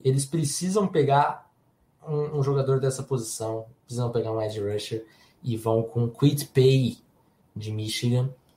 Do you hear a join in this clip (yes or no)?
no